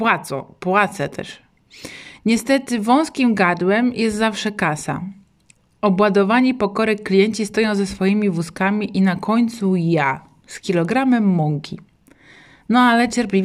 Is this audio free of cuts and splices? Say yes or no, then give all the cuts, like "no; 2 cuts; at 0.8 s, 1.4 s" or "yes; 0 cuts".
yes; 0 cuts